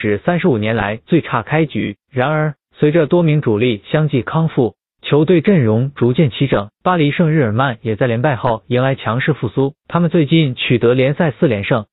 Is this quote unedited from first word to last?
no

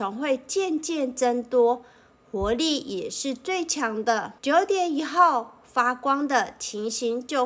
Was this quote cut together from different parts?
yes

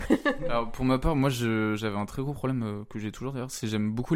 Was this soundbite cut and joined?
no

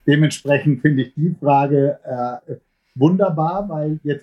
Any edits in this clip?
no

